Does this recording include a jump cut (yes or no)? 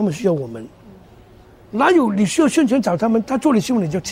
no